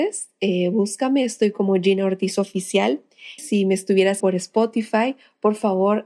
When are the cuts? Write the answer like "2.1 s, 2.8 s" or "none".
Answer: 3.4 s, 4.2 s